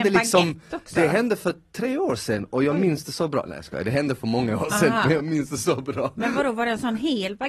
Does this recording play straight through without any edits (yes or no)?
yes